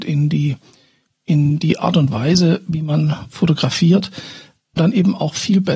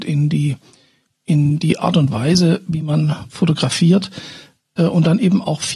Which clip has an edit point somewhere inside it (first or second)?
first